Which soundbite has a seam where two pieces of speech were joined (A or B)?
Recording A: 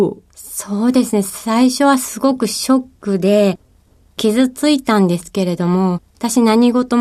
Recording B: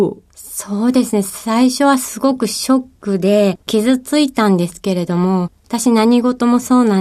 B